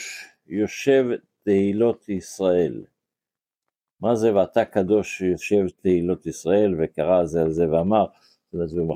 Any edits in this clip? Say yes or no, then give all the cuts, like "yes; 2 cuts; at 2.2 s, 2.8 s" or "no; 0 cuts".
no; 0 cuts